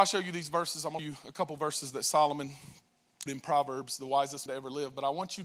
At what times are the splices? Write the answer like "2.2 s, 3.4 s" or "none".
1.0 s, 3.3 s, 4.5 s